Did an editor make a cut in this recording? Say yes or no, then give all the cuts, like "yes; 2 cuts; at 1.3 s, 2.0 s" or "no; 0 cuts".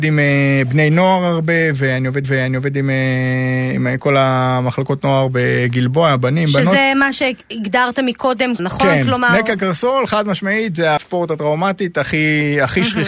yes; 3 cuts; at 2.2 s, 8.6 s, 11.0 s